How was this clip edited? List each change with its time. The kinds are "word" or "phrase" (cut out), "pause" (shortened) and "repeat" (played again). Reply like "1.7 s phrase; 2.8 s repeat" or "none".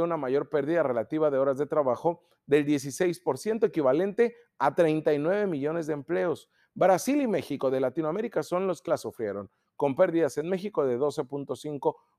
8.9 s word